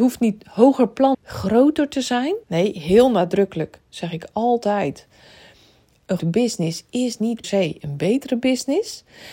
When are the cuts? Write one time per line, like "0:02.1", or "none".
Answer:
0:01.1
0:02.4
0:06.2
0:07.4